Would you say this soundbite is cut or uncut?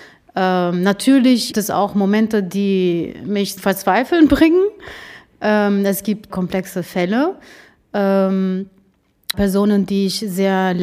cut